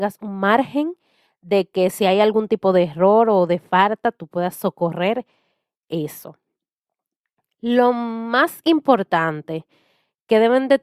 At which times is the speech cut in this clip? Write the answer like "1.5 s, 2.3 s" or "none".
none